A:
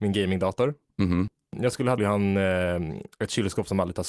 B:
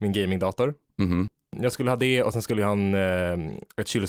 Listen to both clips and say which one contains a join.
A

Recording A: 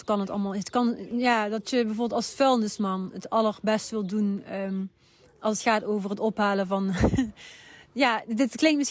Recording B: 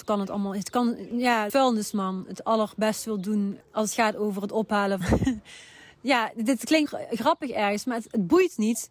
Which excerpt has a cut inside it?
B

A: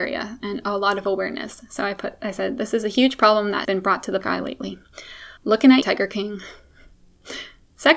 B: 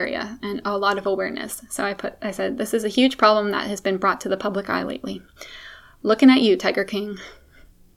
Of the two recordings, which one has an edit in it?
A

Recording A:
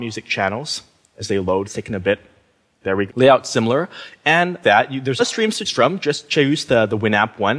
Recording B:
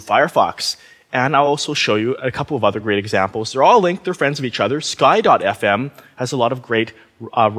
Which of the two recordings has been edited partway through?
A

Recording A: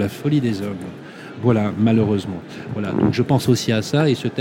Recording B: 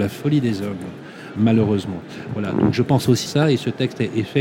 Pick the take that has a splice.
B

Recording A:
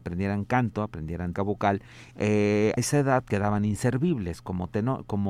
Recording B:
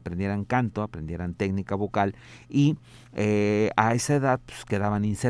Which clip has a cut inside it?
A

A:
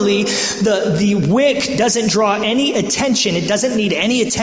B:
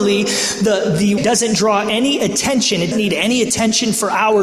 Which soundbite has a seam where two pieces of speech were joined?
B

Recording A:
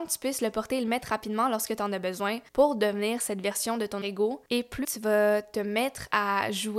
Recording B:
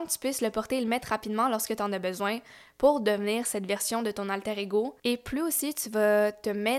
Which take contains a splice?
A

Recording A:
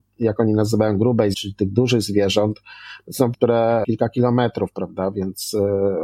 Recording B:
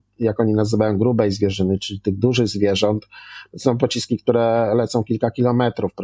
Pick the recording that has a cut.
A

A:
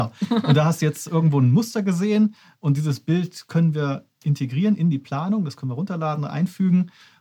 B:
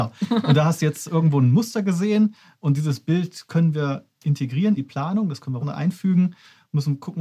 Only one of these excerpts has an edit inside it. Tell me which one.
B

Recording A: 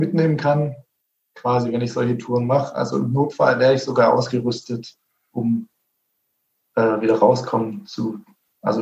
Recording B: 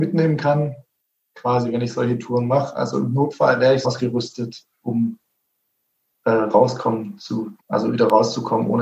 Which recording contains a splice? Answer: B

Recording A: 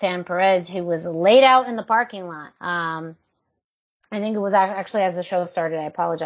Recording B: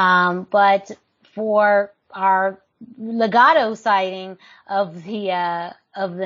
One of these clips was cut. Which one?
A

